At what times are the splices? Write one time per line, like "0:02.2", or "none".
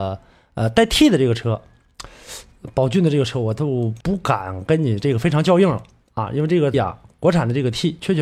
0:04.0
0:06.7

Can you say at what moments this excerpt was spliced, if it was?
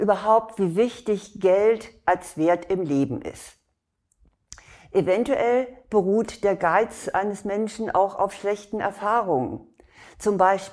none

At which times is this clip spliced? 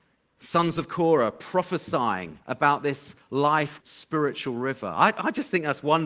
0:02.4
0:03.8

